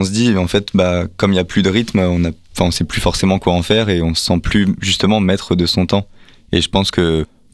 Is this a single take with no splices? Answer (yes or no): yes